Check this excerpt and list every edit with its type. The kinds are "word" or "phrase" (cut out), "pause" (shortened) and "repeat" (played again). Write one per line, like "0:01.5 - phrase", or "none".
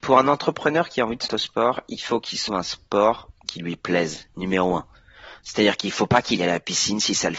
0:01.3 - word
0:02.5 - word
0:06.4 - word